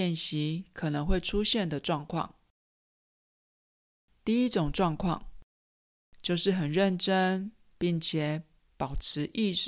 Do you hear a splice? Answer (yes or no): no